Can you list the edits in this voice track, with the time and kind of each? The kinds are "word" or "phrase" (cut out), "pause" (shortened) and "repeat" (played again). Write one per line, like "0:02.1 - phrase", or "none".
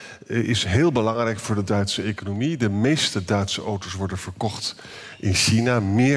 none